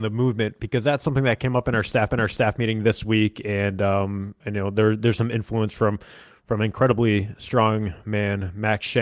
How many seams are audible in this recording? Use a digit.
1